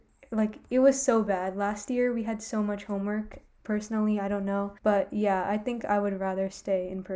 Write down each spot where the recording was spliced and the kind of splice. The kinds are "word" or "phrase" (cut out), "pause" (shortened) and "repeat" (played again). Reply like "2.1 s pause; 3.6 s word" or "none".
4.8 s pause